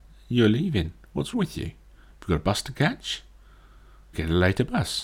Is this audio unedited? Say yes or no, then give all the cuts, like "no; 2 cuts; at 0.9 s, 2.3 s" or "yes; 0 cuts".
no; 2 cuts; at 1.3 s, 4.1 s